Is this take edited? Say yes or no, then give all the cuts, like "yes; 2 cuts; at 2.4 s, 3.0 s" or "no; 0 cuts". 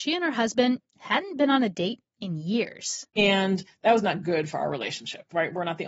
no; 0 cuts